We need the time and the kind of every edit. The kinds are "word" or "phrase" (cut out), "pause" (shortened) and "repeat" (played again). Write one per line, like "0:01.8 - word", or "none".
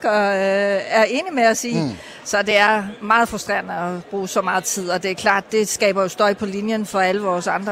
none